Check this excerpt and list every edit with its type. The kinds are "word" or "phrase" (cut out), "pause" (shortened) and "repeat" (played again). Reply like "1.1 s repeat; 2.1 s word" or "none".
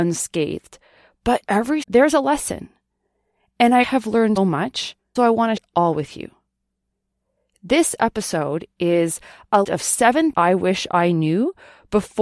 1.5 s word; 1.8 s word; 3.8 s word; 4.4 s word; 5.2 s word; 5.6 s word; 9.6 s word; 10.3 s word